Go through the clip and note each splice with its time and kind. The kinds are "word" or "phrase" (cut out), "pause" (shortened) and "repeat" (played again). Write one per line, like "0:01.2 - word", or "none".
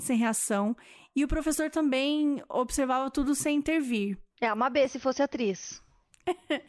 0:04.3 - pause